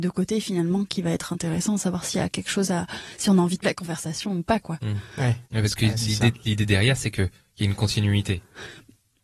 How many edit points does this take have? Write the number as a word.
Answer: two